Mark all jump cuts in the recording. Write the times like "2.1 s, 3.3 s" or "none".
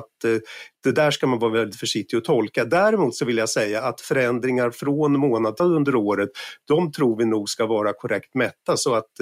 5.6 s